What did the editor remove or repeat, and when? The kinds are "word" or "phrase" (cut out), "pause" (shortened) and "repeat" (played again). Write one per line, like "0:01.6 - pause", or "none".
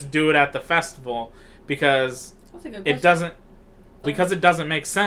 0:04.0 - word